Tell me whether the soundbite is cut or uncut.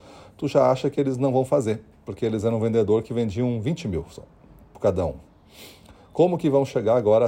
uncut